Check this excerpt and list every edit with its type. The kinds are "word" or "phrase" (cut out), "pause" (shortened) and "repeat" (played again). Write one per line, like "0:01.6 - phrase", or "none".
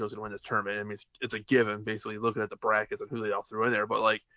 none